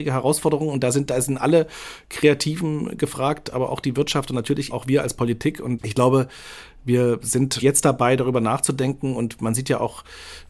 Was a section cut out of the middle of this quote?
yes; 3 cuts; at 4.7 s, 5.8 s, 7.6 s

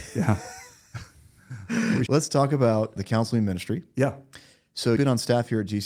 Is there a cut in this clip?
yes; 3 cuts; at 2.1 s, 3.0 s, 5.0 s

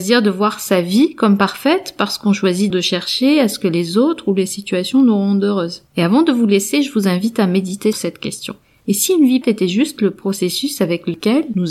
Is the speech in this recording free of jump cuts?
no; 4 cuts; at 2.7 s, 5.9 s, 7.9 s, 9.4 s

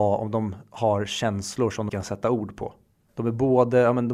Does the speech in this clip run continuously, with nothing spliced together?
no; 1 cut; at 1.9 s

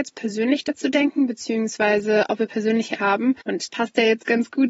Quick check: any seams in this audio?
yes; 2 cuts; at 3.0 s, 3.7 s

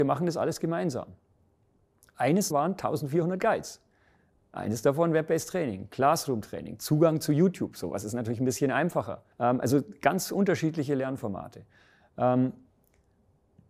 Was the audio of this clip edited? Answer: yes; 2 cuts; at 2.5 s, 9.3 s

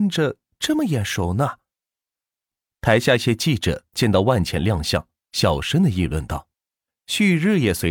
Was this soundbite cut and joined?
yes; 1 cut; at 6.5 s

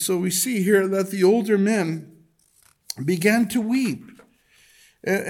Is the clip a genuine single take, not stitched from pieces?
yes; 0 cuts

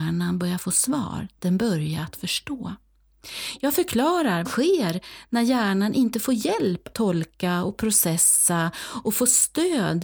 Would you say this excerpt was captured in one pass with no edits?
no; 2 cuts; at 4.4 s, 6.9 s

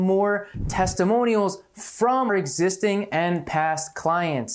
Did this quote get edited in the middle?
yes; 1 cut; at 2.3 s

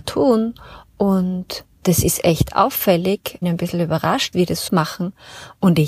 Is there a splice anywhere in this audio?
yes; 4 cuts; at 1.7 s, 3.4 s, 4.3 s, 4.7 s

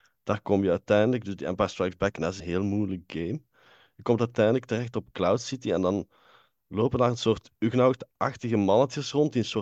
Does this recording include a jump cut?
yes; 1 cut; at 2.4 s

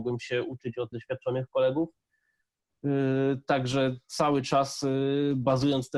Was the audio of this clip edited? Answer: yes; 1 cut; at 0.9 s

